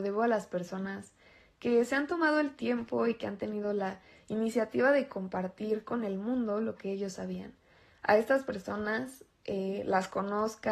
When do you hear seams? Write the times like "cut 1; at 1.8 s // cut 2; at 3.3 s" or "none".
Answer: none